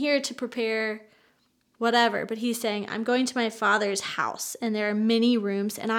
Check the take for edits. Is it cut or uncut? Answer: uncut